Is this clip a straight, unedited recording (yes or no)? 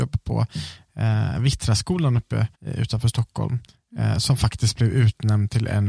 no